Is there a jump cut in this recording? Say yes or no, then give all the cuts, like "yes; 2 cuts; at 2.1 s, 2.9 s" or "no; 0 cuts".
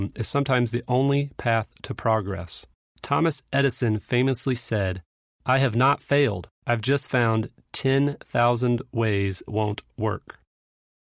yes; 4 cuts; at 2.7 s, 5.1 s, 6.6 s, 9.5 s